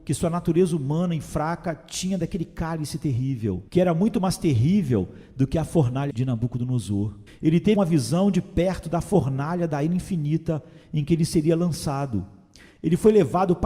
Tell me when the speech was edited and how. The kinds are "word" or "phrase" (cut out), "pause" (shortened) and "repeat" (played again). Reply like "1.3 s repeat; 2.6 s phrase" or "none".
3.7 s pause; 6.1 s word; 7.3 s pause; 7.8 s word

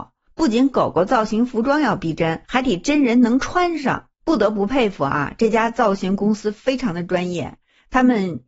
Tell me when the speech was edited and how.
4.1 s pause

